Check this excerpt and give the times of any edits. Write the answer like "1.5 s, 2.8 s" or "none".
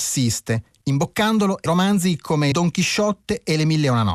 1.7 s, 2.5 s